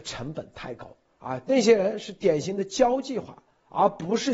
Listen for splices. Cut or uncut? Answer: cut